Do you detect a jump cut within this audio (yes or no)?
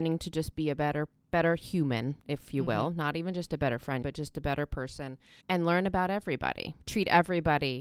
yes